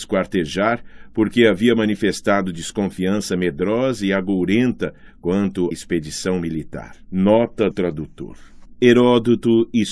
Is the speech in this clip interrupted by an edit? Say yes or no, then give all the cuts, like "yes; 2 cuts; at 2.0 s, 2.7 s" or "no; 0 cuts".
yes; 2 cuts; at 5.7 s, 7.7 s